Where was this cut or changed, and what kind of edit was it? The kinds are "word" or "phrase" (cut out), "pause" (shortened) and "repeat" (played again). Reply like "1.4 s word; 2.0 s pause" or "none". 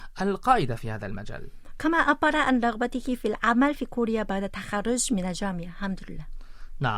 none